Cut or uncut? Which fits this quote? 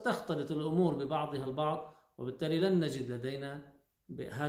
uncut